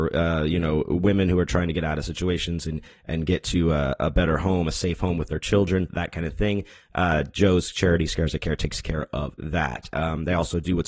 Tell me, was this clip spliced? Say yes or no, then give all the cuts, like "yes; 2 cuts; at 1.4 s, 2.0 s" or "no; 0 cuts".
no; 0 cuts